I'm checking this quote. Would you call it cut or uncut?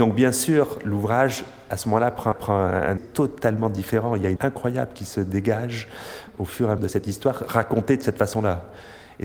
cut